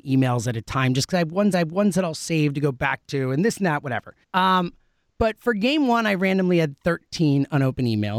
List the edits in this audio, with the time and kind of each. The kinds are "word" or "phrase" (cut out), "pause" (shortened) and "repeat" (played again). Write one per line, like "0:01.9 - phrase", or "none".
0:01.5 - repeat
0:04.2 - pause